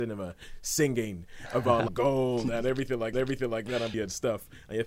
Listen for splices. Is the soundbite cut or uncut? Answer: cut